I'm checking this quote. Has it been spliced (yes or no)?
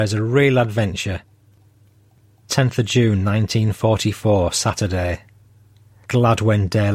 no